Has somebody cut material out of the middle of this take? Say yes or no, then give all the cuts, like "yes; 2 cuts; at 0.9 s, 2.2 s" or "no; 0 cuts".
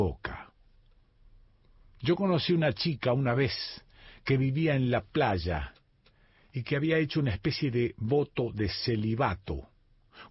no; 0 cuts